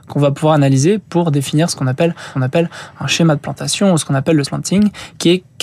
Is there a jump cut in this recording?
yes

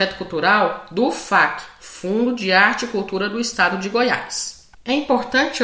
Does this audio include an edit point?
no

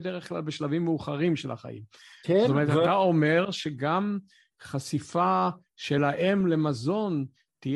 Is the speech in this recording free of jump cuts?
yes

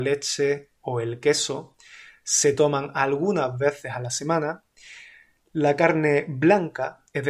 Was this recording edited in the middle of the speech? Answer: no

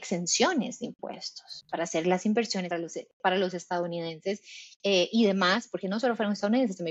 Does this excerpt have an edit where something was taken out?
yes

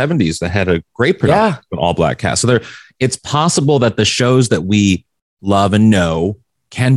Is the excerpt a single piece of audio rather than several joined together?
yes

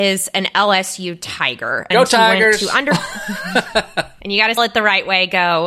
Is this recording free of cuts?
no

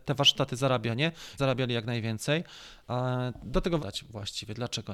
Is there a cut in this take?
yes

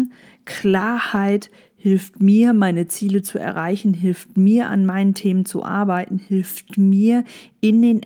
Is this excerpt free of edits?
yes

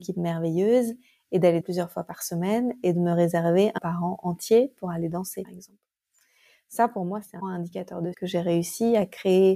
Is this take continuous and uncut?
no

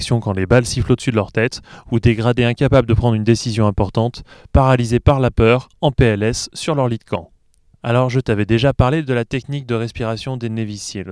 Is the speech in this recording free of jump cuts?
yes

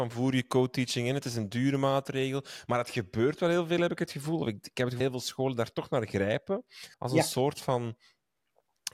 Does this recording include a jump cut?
yes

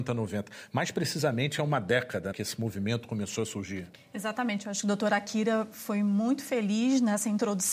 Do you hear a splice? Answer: yes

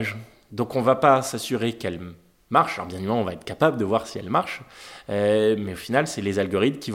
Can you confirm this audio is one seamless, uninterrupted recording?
yes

